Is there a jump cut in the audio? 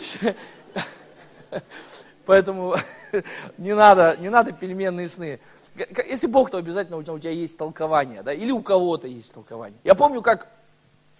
yes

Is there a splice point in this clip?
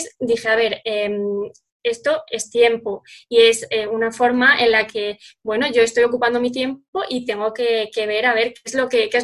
no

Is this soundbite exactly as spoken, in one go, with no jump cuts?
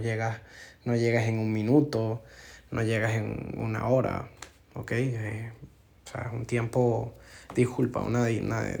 yes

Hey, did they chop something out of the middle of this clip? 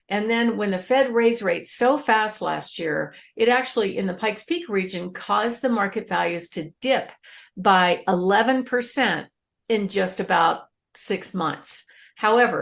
no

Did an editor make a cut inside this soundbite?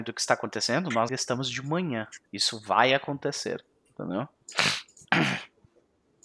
yes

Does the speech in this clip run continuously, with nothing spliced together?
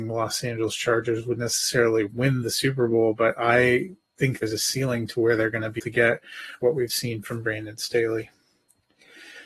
no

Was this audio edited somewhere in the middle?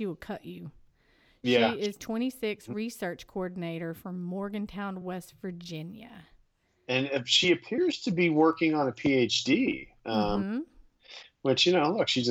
no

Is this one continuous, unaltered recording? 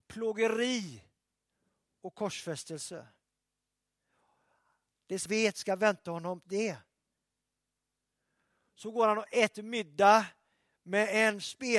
no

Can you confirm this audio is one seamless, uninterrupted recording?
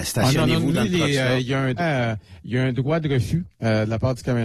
no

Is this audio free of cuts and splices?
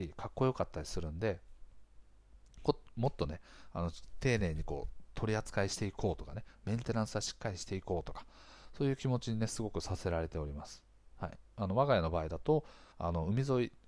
no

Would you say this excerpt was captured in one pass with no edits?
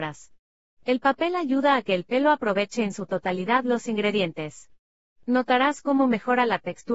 yes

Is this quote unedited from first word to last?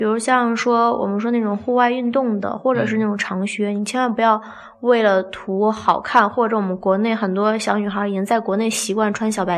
yes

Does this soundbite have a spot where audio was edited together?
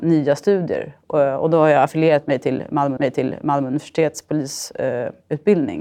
yes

